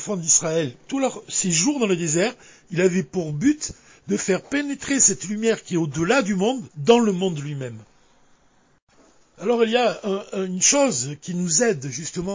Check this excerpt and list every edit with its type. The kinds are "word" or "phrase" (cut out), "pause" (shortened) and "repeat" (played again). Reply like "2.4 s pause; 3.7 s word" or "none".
6.7 s pause